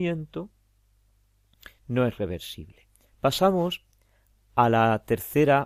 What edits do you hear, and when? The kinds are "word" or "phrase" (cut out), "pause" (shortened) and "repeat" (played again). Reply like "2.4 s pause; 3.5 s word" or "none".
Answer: none